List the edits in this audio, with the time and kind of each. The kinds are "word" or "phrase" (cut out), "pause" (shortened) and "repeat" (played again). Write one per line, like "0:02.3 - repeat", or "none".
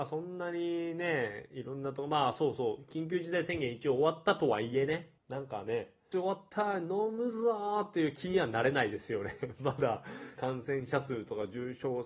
0:05.2 - pause
0:06.1 - phrase
0:10.4 - phrase